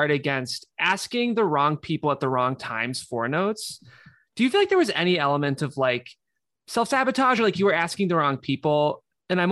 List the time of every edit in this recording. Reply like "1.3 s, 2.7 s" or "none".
none

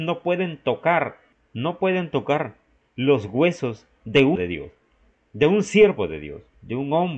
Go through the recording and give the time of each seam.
4.4 s

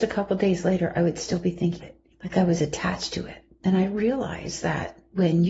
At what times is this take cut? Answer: 1.8 s, 2.1 s, 3.5 s

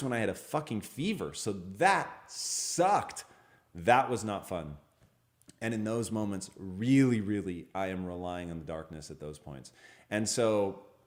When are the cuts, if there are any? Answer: none

